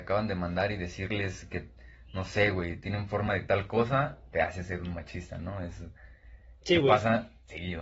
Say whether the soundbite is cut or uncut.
uncut